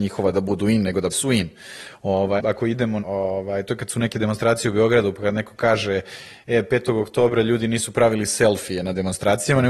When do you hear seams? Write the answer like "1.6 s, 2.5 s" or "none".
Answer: 1.1 s, 2.4 s, 3.0 s